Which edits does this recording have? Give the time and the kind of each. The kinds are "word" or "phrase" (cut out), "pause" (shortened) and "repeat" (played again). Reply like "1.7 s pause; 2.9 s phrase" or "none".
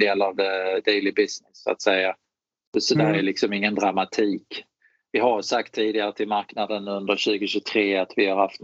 none